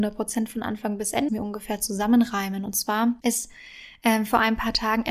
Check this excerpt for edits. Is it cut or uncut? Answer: cut